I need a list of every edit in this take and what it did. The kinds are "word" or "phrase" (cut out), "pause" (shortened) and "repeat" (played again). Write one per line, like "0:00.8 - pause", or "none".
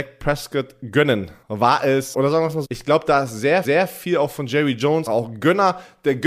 0:01.4 - pause
0:02.1 - word
0:02.6 - word
0:03.6 - repeat
0:05.1 - word